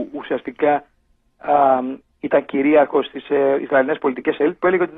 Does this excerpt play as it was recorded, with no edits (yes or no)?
yes